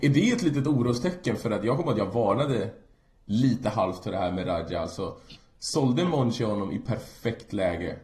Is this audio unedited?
yes; 0 cuts

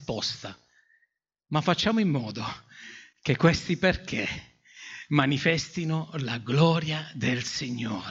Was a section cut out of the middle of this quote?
no; 0 cuts

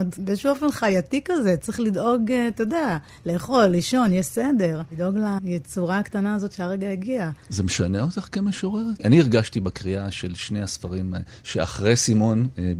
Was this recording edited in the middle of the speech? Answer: no; 0 cuts

